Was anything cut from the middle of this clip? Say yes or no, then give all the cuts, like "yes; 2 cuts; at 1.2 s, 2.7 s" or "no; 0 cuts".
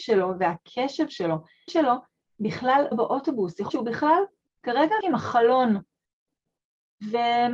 yes; 4 cuts; at 1.7 s, 2.9 s, 3.7 s, 5.0 s